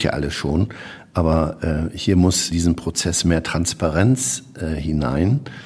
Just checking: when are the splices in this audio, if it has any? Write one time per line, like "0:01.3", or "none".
0:02.5